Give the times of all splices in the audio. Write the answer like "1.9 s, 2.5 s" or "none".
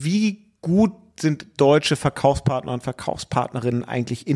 none